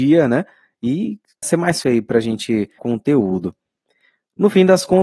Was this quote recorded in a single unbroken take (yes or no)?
no